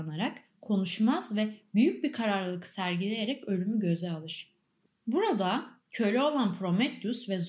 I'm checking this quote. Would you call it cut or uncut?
uncut